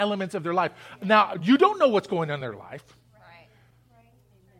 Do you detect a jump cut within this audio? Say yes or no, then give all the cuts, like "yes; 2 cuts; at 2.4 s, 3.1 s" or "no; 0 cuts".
no; 0 cuts